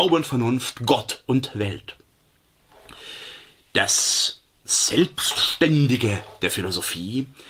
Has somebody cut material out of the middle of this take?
no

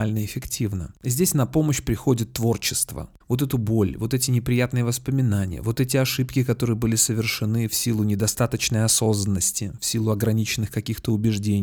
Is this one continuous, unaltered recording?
no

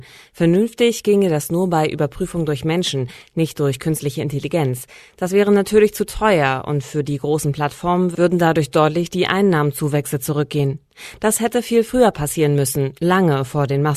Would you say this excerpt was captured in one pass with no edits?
yes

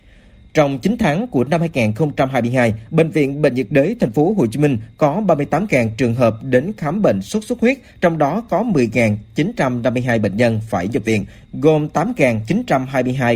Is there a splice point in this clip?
no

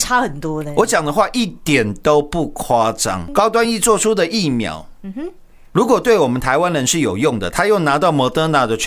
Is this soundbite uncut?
yes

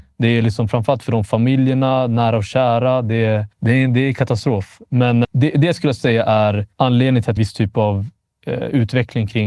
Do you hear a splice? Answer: yes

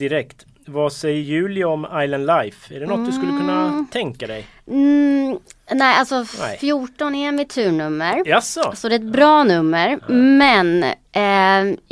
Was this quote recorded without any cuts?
yes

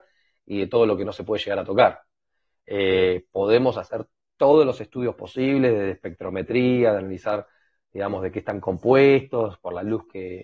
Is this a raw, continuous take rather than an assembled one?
yes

